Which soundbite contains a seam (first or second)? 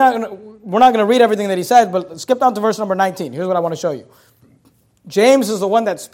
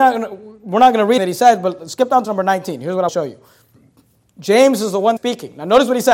second